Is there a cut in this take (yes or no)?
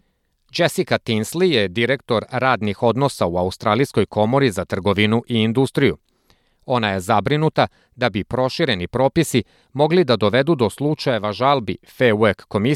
no